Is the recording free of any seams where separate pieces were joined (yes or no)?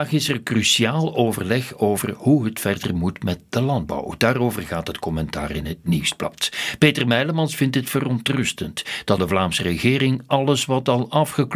no